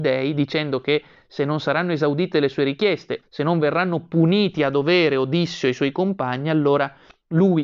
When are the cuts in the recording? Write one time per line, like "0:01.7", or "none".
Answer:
0:03.2